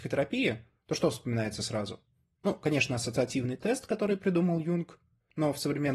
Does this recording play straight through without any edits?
yes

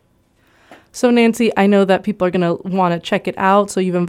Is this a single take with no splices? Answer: yes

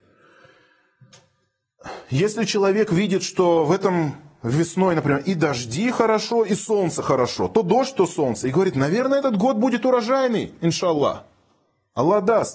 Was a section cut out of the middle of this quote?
no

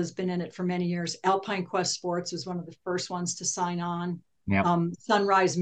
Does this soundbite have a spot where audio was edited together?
no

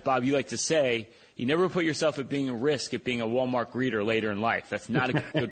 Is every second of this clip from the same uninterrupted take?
yes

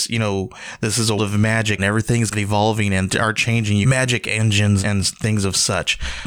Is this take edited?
yes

